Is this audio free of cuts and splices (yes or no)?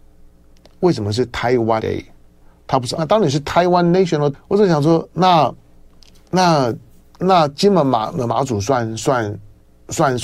no